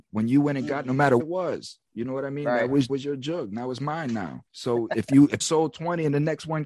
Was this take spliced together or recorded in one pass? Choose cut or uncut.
cut